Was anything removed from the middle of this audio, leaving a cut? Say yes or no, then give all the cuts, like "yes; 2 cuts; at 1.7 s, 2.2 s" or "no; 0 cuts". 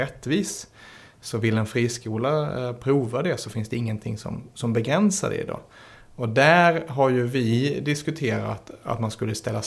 no; 0 cuts